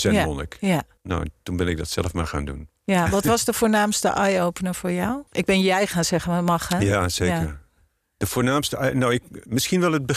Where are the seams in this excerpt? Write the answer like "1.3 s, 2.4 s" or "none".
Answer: 1.0 s, 5.3 s